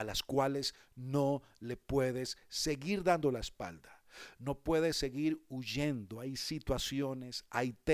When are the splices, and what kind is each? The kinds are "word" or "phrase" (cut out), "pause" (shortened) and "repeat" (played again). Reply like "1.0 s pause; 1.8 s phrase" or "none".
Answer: none